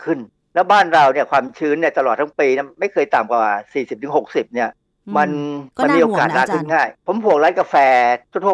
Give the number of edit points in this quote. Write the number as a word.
two